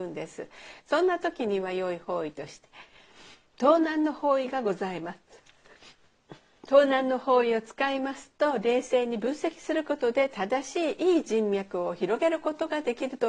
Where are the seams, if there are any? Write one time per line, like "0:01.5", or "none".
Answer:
none